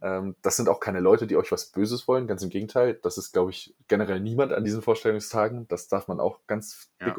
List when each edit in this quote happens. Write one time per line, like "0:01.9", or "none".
none

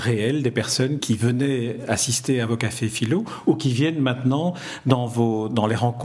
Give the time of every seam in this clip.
0:01.0

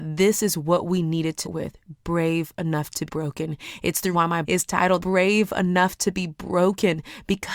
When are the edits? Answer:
0:01.4
0:02.0
0:03.1
0:04.1
0:04.4
0:05.0

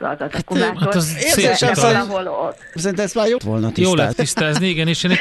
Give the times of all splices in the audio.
0:02.8
0:03.4
0:04.1

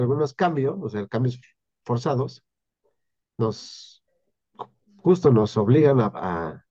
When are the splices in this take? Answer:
none

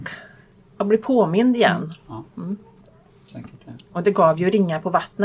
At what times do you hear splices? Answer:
none

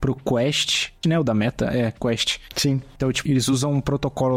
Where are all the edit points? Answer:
0:01.0
0:03.3

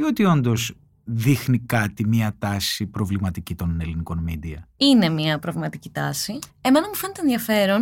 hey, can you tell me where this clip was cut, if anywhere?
0:06.5

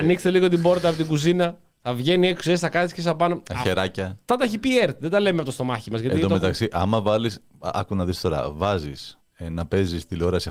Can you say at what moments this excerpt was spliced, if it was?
0:04.3
0:09.2

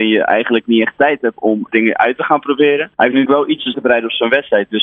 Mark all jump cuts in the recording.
0:01.7
0:02.9
0:03.3
0:03.7

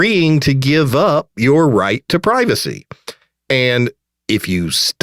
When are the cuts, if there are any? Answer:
none

